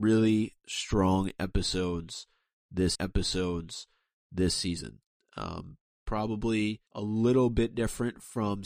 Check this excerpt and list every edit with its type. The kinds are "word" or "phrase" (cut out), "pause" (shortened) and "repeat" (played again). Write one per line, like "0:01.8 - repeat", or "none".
0:02.9 - repeat
0:06.9 - pause